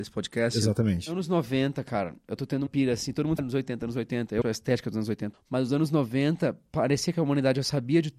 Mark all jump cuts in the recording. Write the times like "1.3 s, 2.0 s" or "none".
2.4 s, 2.7 s, 3.4 s, 4.4 s, 5.3 s